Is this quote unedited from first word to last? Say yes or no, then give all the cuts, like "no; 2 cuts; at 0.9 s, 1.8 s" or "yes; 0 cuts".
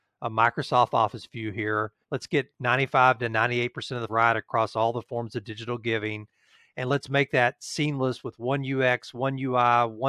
no; 2 cuts; at 2.0 s, 4.1 s